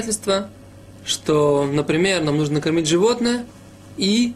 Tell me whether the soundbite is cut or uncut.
uncut